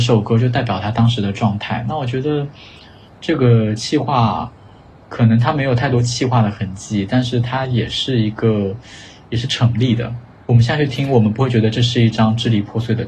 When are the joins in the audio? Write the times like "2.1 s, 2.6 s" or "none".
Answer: none